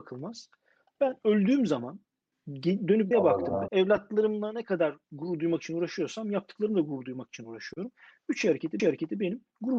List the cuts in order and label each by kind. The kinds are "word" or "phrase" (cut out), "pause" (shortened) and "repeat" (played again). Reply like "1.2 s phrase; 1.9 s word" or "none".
2.3 s pause; 3.1 s word; 3.7 s word; 5.0 s pause; 8.8 s repeat